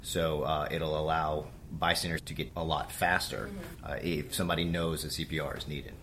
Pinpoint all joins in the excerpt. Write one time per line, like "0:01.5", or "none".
0:02.2
0:02.5